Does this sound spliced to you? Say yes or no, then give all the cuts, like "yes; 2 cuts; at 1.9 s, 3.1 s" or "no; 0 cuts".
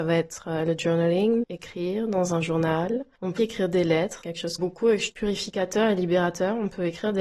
yes; 5 cuts; at 1.4 s, 3.4 s, 4.2 s, 4.6 s, 5.1 s